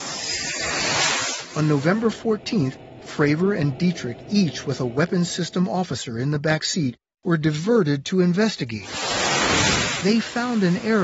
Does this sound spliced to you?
no; 0 cuts

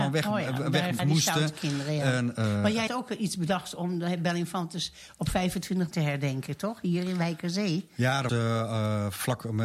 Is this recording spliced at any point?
yes; 5 cuts; at 1.0 s, 2.3 s, 2.9 s, 5.9 s, 8.3 s

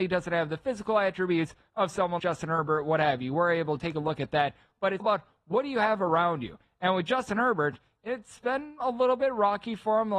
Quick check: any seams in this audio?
yes; 2 cuts; at 2.2 s, 5.0 s

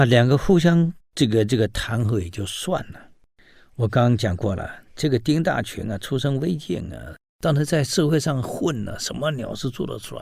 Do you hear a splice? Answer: yes; 2 cuts; at 1.0 s, 3.3 s

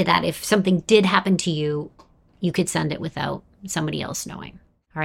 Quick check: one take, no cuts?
yes; 0 cuts

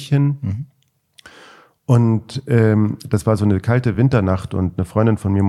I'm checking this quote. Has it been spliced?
no; 0 cuts

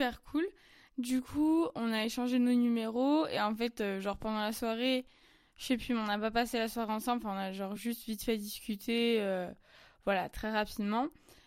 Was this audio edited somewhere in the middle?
no; 0 cuts

